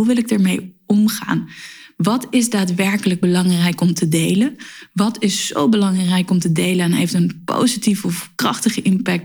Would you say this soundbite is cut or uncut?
uncut